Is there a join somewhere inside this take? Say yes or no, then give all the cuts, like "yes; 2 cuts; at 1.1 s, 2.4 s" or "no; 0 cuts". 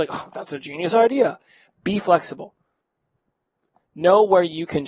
no; 0 cuts